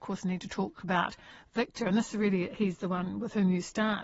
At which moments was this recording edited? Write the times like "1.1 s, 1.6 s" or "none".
none

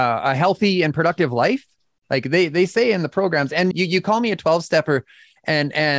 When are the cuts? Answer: 3.7 s

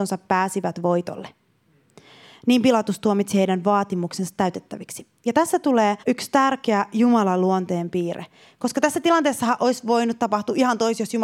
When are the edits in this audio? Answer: 6.0 s

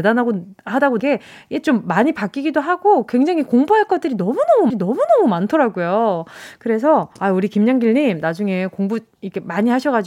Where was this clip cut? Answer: 1.0 s, 4.7 s, 7.1 s

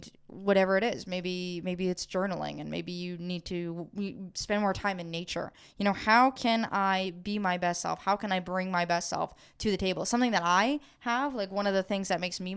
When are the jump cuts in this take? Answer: none

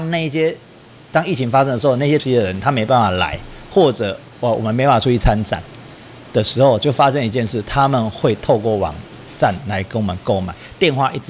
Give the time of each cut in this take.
2.2 s

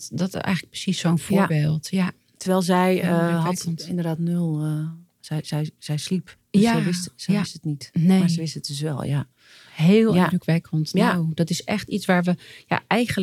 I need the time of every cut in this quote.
none

